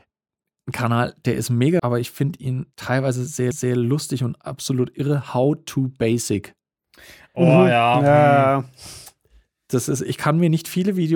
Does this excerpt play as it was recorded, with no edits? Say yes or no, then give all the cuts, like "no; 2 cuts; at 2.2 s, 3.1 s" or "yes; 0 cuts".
no; 3 cuts; at 1.8 s, 2.7 s, 3.5 s